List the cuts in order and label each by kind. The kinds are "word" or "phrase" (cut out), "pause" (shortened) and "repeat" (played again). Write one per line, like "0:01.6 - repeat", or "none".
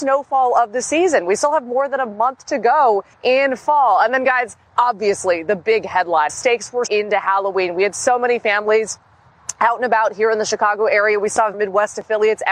0:03.1 - pause
0:04.7 - pause
0:06.3 - phrase
0:06.9 - phrase
0:11.5 - phrase